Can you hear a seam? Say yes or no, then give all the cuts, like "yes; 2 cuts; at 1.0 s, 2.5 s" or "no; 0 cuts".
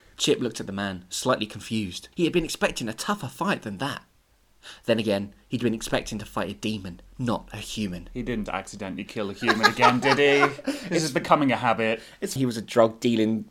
yes; 3 cuts; at 2.1 s, 8.5 s, 12.4 s